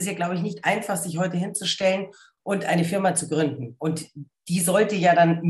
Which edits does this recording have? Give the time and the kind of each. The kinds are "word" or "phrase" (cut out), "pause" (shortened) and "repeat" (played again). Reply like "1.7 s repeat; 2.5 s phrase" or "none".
none